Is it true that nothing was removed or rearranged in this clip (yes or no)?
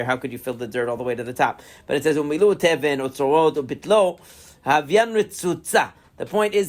yes